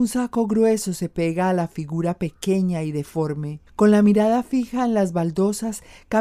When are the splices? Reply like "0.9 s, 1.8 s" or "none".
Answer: 3.7 s